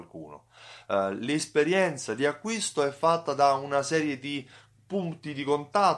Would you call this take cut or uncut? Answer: uncut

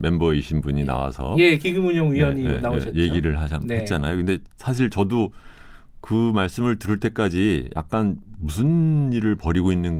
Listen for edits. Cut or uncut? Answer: uncut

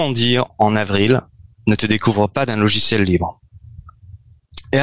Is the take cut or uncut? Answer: uncut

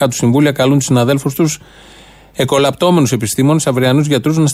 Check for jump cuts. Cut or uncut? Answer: uncut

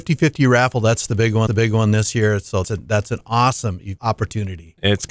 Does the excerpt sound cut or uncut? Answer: cut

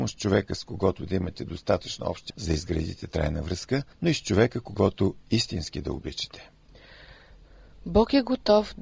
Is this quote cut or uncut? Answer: cut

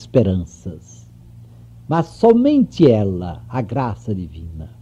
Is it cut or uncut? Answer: uncut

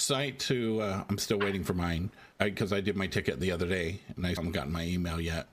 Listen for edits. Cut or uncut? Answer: cut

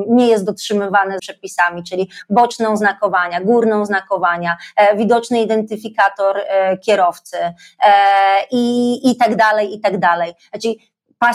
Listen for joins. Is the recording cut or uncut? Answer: cut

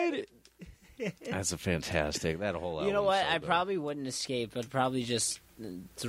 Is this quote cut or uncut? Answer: uncut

